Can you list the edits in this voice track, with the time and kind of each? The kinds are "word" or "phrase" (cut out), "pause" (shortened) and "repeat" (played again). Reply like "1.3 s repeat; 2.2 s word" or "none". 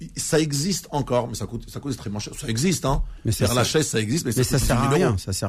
none